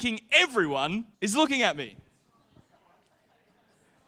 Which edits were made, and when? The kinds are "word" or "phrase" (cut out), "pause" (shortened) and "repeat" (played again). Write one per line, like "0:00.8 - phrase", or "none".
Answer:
0:01.1 - pause